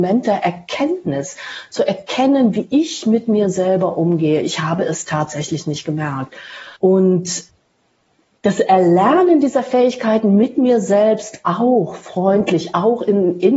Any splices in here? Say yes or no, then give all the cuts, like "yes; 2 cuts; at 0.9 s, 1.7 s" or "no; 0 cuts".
yes; 1 cut; at 6.8 s